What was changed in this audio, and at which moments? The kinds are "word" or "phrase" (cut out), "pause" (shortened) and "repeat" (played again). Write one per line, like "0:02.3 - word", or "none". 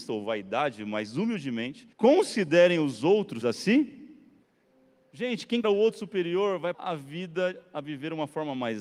0:01.9 - pause
0:03.4 - word
0:04.4 - pause
0:05.6 - word
0:06.7 - word